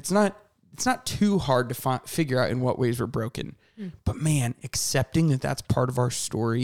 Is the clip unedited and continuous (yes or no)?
yes